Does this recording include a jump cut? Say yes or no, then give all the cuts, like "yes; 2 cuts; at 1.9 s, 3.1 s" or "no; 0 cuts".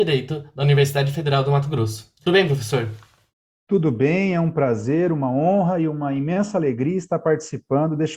no; 0 cuts